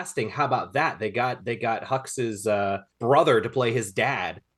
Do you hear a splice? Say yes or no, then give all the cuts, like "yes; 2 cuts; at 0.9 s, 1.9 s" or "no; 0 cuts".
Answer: yes; 1 cut; at 2.9 s